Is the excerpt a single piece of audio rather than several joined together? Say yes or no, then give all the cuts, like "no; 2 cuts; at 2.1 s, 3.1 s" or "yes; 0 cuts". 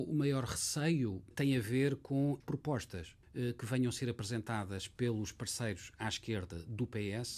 no; 2 cuts; at 2.4 s, 3.2 s